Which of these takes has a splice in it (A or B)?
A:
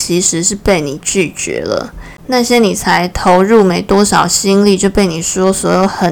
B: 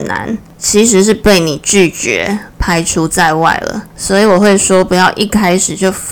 B